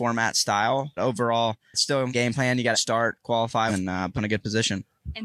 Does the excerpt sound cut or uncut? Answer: cut